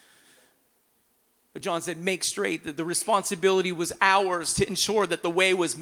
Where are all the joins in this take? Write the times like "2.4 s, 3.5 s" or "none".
none